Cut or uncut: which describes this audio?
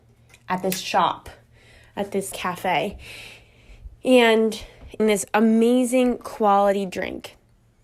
cut